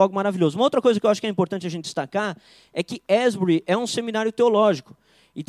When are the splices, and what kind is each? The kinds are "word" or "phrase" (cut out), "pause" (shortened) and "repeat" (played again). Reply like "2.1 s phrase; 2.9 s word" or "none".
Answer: none